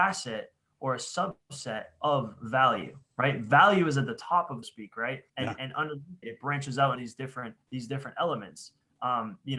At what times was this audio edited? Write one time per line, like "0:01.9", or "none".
0:04.6
0:05.3
0:06.2
0:07.0
0:07.6